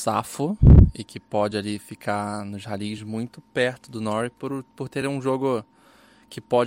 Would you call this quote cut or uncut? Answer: uncut